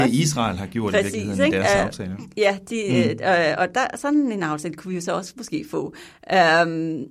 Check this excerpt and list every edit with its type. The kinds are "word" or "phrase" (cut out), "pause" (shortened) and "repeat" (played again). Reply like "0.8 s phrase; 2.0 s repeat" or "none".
none